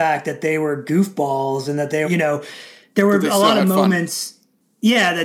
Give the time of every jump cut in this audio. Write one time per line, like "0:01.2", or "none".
0:02.0